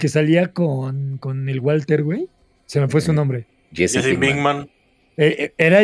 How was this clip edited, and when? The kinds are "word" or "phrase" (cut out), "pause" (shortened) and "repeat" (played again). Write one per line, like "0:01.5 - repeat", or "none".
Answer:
none